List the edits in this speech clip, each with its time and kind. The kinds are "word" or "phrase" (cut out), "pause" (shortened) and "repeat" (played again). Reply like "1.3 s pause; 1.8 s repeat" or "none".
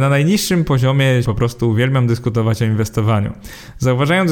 1.2 s word